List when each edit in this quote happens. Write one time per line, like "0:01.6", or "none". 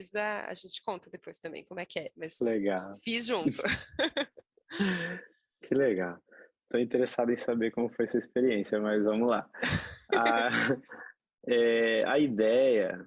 none